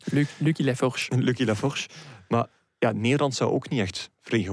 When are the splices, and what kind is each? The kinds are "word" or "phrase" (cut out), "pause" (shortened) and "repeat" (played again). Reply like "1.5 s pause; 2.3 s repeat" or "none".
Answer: none